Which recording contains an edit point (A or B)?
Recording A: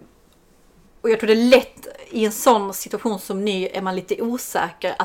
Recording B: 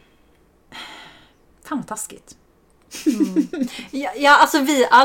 B